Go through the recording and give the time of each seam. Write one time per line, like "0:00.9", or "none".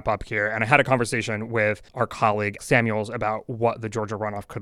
0:01.9
0:02.6